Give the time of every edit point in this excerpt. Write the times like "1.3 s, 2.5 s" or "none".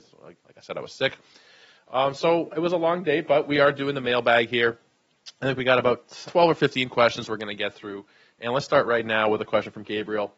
6.2 s